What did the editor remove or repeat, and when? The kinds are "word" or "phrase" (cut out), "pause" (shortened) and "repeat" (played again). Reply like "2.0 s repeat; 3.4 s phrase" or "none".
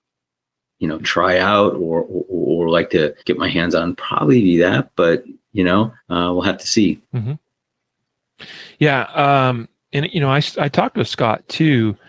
3.2 s pause; 6.0 s pause; 7.0 s pause